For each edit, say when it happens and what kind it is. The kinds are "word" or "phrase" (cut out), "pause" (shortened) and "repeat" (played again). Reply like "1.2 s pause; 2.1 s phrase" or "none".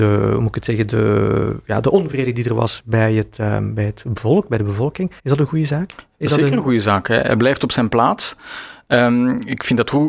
5.2 s pause